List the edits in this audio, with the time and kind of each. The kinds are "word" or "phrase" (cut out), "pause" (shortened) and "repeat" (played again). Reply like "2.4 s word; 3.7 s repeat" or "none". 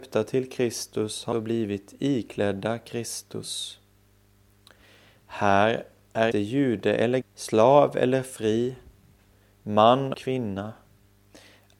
1.3 s word; 6.3 s word; 7.2 s word; 10.1 s word